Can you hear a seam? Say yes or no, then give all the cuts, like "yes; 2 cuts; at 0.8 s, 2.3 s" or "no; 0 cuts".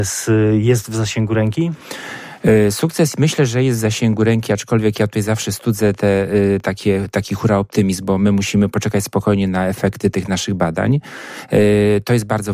no; 0 cuts